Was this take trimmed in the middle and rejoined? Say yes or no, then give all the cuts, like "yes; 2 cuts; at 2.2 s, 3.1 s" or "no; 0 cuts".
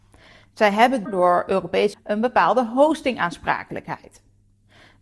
yes; 2 cuts; at 1.1 s, 1.9 s